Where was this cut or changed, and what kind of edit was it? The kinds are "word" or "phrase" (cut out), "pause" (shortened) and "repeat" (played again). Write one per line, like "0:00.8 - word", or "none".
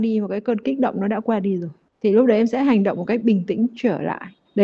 none